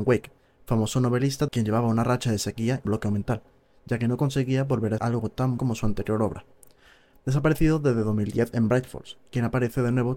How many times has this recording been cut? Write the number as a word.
four